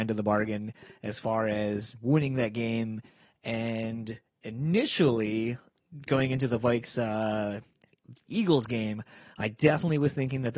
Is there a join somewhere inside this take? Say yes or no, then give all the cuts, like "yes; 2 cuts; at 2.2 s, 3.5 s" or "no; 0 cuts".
no; 0 cuts